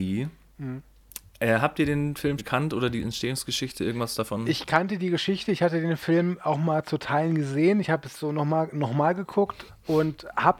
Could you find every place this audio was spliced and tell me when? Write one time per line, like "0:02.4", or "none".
0:02.4
0:08.1
0:09.7

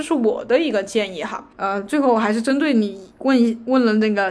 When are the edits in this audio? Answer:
0:01.5

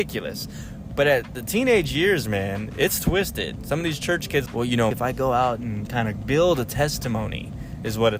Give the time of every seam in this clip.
0:04.5
0:04.9
0:05.9

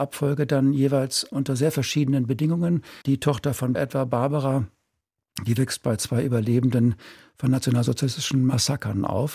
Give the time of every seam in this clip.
0:01.3
0:03.0
0:03.7

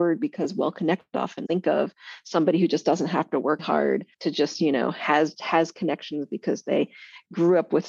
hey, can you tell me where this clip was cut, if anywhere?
0:01.4
0:03.6
0:04.1
0:05.4

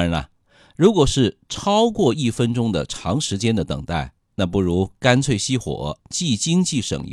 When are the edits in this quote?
0:06.0

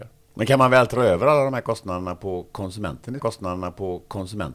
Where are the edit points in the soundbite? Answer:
0:03.2

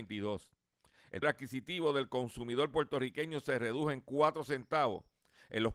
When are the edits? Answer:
0:01.2

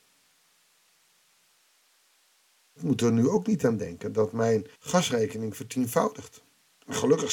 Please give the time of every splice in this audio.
0:04.7

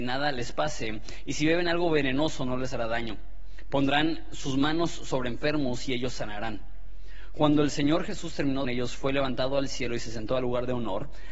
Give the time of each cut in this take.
0:08.6

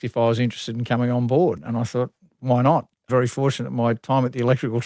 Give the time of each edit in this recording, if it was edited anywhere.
0:03.1

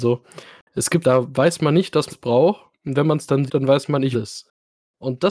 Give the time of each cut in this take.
0:01.0
0:02.1
0:03.5
0:04.1

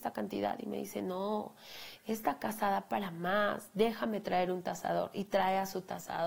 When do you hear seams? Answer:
none

